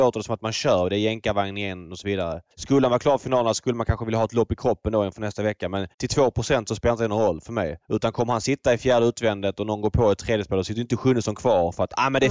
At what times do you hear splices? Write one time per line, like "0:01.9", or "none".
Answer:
0:02.5
0:05.9
0:07.8